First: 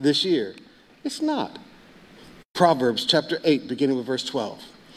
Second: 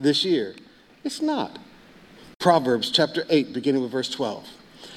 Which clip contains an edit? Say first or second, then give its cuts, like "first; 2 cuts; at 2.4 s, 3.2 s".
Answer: second; 1 cut; at 2.3 s